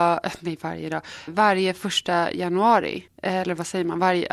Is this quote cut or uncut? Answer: cut